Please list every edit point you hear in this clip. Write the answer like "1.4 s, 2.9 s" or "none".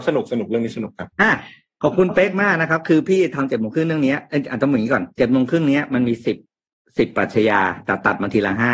1.1 s